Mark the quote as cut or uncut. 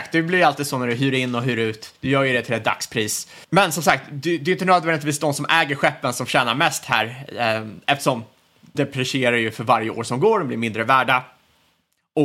cut